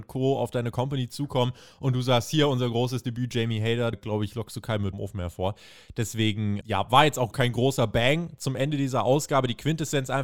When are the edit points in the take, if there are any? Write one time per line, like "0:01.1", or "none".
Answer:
0:03.9
0:04.9
0:06.6
0:07.3